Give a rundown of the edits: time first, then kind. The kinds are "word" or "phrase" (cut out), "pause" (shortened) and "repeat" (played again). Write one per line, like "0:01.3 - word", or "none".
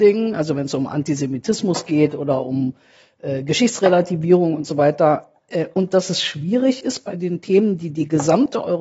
none